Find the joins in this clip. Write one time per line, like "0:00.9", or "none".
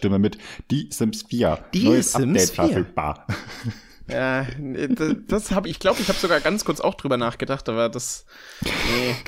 0:05.6